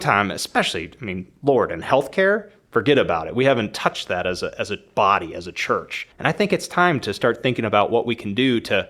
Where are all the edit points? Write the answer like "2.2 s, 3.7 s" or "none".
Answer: 6.1 s